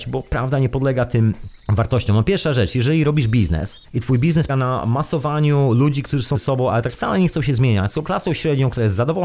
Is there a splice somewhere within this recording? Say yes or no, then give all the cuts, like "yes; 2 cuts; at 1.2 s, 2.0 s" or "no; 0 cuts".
yes; 6 cuts; at 1.6 s, 3.8 s, 4.5 s, 6.3 s, 6.9 s, 8.0 s